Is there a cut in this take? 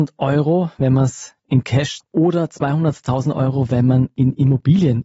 yes; 1 cut; at 2.0 s

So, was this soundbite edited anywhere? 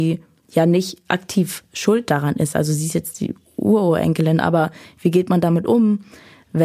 no; 0 cuts

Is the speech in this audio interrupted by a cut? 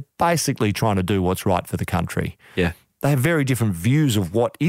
no; 0 cuts

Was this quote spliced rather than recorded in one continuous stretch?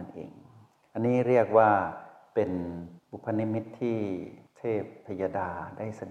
no; 0 cuts

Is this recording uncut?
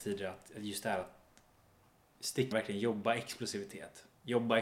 no; 1 cut; at 2.5 s

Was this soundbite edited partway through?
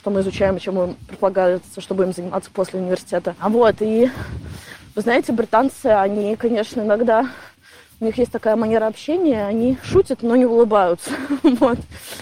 no; 0 cuts

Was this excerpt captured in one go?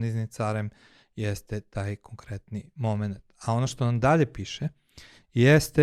yes; 0 cuts

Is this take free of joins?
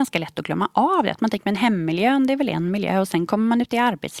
yes; 0 cuts

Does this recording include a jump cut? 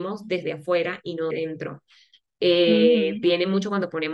yes; 1 cut; at 1.3 s

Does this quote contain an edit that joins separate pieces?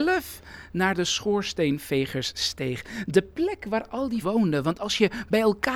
yes; 1 cut; at 4.2 s

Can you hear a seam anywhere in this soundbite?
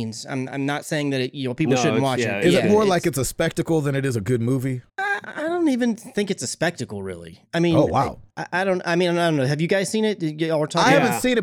yes; 2 cuts; at 4.9 s, 8.3 s

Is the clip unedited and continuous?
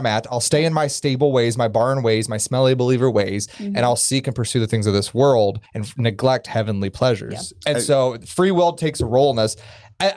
no; 1 cut; at 5.7 s

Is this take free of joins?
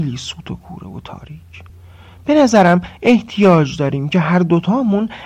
yes; 0 cuts

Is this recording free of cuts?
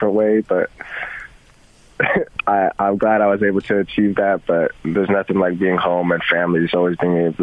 yes; 0 cuts

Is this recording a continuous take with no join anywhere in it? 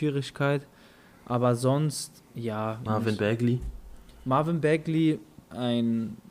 no; 1 cut; at 2.9 s

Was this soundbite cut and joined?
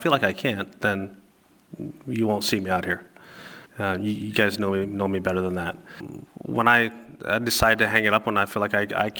yes; 2 cuts; at 3.7 s, 6.3 s

